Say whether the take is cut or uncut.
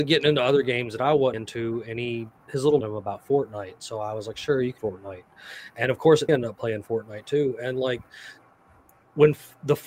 cut